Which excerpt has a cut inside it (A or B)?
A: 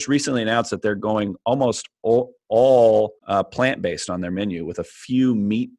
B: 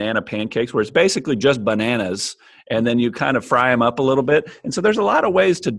A